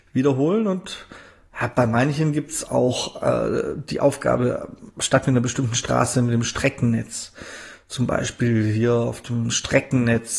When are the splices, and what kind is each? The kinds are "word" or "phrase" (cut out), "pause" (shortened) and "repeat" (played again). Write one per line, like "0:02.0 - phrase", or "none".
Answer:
none